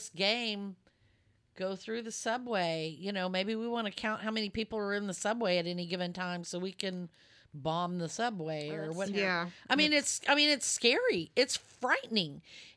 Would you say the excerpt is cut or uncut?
uncut